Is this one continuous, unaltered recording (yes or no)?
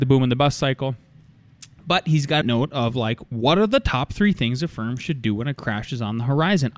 no